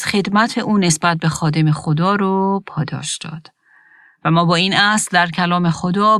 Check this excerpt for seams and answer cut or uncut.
uncut